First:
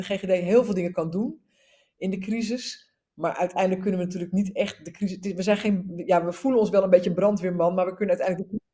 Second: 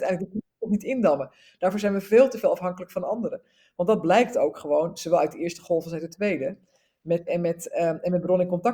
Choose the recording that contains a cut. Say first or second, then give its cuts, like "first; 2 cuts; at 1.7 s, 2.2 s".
second; 1 cut; at 7.3 s